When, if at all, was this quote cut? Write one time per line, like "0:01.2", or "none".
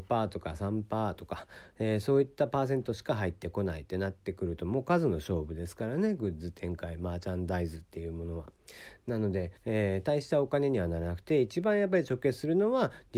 0:09.6